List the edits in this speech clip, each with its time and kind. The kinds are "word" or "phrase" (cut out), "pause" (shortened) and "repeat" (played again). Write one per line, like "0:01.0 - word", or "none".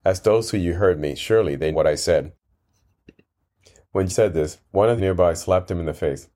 0:01.7 - word
0:04.1 - word
0:04.7 - pause
0:05.0 - phrase